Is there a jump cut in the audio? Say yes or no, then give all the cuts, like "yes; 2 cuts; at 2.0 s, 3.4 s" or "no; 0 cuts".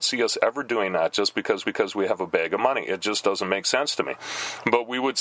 yes; 1 cut; at 1.6 s